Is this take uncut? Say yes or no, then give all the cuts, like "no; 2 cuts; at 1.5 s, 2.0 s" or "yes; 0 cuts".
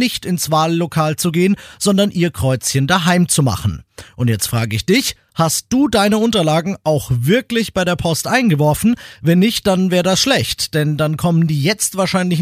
yes; 0 cuts